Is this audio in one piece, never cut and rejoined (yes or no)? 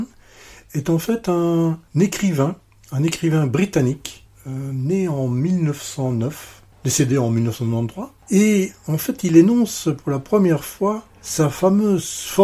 yes